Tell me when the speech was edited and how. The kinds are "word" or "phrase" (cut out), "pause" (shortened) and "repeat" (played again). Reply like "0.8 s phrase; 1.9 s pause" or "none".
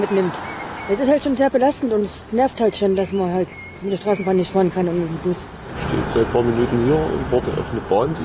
none

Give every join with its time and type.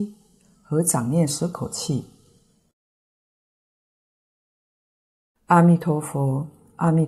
none

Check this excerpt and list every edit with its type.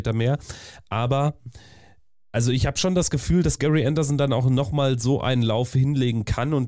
none

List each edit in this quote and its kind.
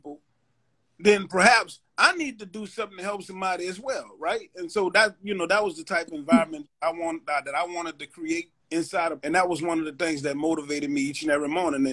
8.6 s pause; 9.2 s word

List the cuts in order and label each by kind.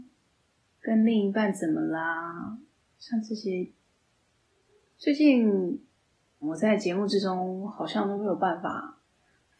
6.4 s word

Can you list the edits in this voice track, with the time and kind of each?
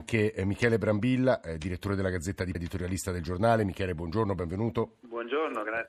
2.5 s word

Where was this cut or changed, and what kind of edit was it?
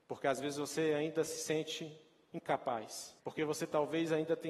3.2 s pause

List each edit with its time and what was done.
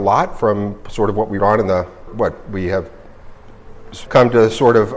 1.4 s word; 2.1 s word; 4.1 s word

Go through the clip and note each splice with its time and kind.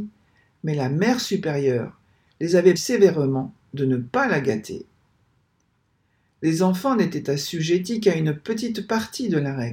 2.8 s word

